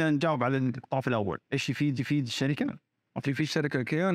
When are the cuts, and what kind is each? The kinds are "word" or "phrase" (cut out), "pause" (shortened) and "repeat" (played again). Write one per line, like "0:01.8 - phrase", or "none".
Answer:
0:01.4 - pause
0:02.0 - repeat
0:03.2 - word